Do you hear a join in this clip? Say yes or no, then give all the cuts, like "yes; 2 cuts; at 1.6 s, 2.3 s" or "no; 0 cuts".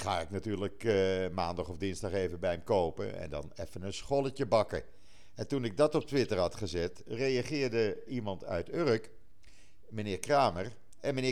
yes; 1 cut; at 8.1 s